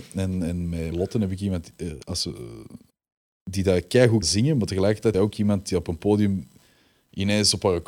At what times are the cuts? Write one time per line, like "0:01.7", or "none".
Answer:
0:00.9
0:02.0
0:02.9
0:04.2
0:05.1

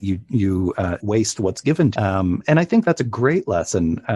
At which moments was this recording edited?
0:01.0
0:01.9

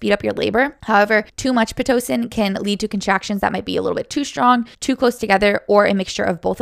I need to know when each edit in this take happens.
0:04.7

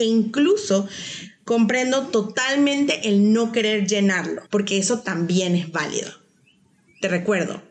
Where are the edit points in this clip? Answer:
0:04.5

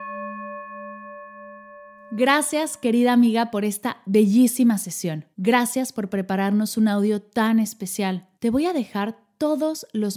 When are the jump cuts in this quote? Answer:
0:05.3
0:08.3

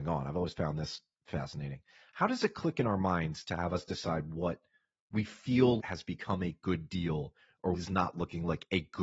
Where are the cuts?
0:05.8
0:07.7

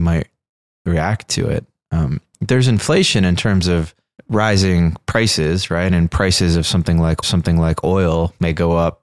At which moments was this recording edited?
0:04.2
0:07.2

